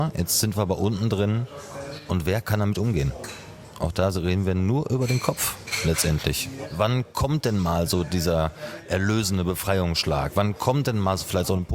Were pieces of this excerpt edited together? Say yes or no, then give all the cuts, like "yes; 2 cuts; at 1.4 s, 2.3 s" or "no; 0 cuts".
no; 0 cuts